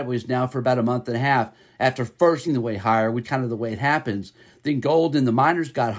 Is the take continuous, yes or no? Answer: no